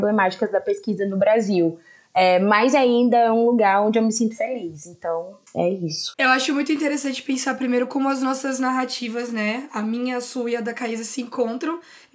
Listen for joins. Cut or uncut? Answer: uncut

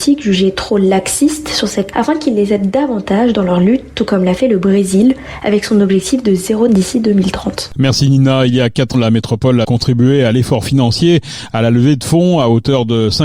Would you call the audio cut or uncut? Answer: cut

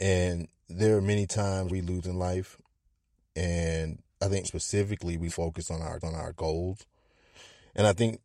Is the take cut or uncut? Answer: cut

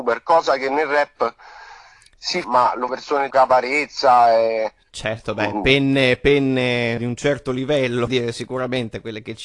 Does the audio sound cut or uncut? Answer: cut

